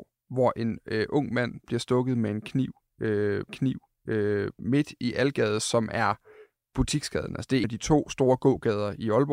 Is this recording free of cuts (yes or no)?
no